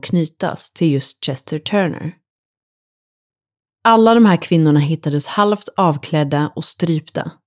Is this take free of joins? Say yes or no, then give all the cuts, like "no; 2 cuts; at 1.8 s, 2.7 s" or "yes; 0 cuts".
yes; 0 cuts